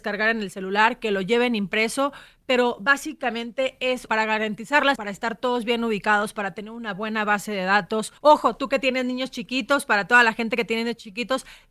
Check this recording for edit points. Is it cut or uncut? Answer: cut